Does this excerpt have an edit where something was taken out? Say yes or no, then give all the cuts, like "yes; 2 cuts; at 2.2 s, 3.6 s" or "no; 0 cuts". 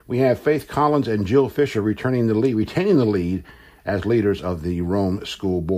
no; 0 cuts